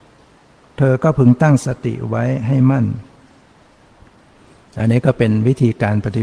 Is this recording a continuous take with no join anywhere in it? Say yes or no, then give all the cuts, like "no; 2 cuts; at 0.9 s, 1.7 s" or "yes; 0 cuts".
yes; 0 cuts